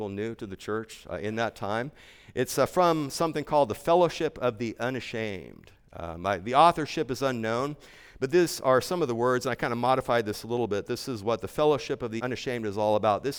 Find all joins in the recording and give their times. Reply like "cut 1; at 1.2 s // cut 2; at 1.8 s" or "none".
cut 1; at 12.2 s